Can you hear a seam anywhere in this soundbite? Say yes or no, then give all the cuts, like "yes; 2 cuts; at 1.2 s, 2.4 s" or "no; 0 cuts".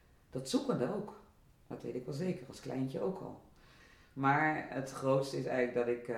no; 0 cuts